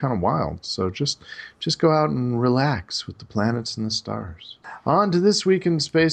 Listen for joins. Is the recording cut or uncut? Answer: uncut